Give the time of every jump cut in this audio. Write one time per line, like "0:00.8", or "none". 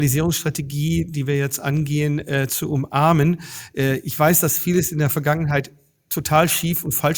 none